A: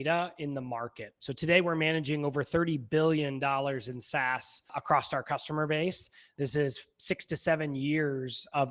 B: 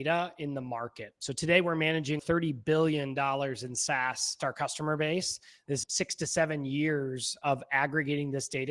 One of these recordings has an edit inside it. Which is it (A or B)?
B